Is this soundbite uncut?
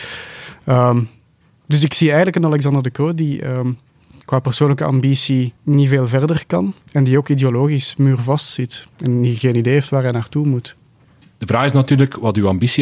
no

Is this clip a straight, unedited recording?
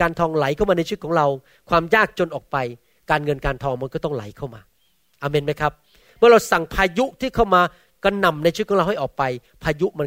yes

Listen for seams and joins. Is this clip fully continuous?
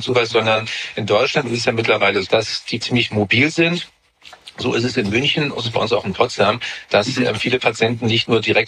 no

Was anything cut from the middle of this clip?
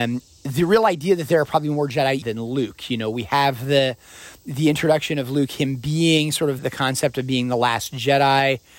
yes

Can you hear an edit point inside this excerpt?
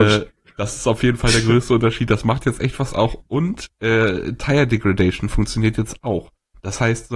no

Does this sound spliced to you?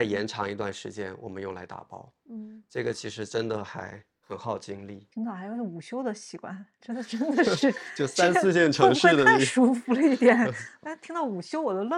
yes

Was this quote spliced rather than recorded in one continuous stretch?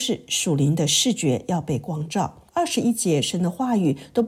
yes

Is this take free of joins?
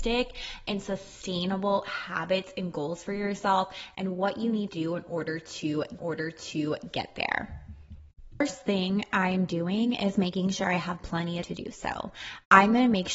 no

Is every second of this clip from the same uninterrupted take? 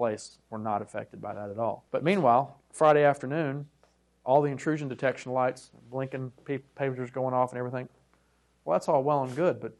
no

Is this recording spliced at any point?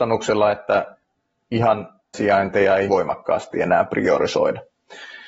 yes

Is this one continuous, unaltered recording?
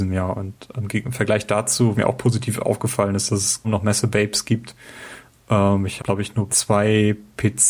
no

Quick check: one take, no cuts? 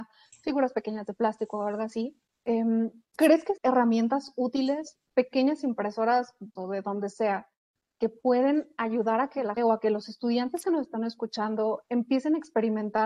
no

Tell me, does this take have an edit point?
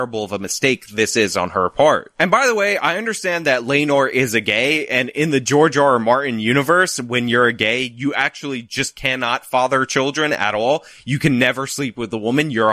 no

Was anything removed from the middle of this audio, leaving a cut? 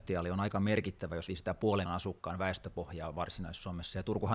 yes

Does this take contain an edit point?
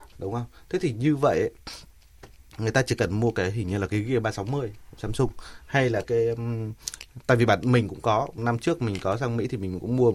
yes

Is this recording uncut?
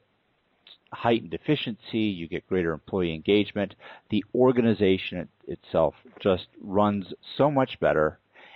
yes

